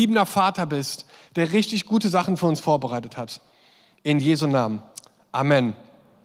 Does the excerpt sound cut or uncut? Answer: uncut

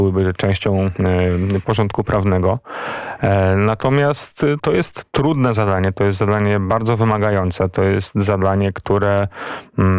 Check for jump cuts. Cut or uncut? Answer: cut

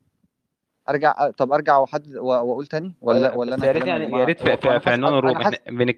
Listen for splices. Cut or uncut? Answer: uncut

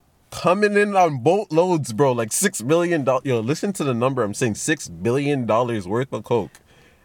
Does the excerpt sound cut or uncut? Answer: uncut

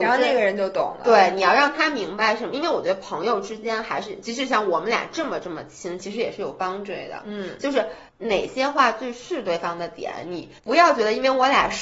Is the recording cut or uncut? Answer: cut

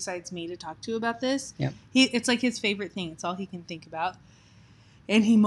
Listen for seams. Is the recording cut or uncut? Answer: uncut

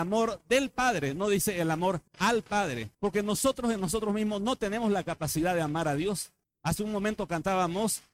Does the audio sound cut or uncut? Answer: cut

